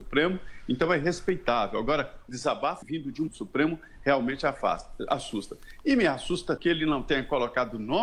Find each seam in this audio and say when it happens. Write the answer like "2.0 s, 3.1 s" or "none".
2.3 s, 2.8 s, 3.3 s, 6.6 s